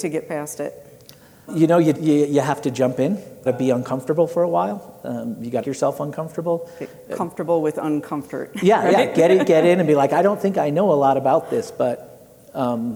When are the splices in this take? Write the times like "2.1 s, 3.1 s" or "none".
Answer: 1.5 s, 1.9 s, 3.5 s, 5.6 s